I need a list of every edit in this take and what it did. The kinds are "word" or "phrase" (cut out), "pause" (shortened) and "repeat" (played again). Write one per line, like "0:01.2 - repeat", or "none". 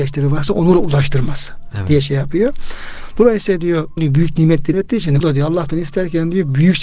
0:04.0 - word
0:04.7 - word
0:05.2 - word